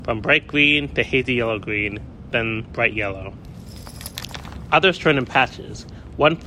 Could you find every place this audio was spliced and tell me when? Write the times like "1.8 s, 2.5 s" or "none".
none